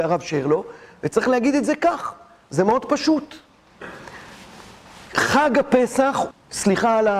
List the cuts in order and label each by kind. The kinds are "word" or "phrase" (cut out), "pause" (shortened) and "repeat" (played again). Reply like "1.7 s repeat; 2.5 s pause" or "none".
6.3 s word